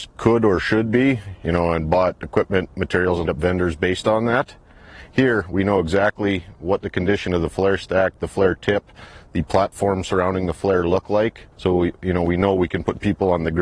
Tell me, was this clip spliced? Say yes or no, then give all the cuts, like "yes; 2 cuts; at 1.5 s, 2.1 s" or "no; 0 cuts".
yes; 2 cuts; at 3.3 s, 11.5 s